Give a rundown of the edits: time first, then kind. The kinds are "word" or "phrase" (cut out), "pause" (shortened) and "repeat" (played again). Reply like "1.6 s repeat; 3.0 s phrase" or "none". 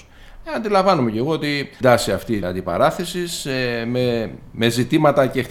1.8 s phrase; 2.4 s word